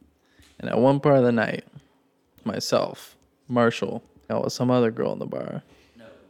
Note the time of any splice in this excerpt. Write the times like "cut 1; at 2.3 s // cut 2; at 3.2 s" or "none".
cut 1; at 2.4 s // cut 2; at 4.3 s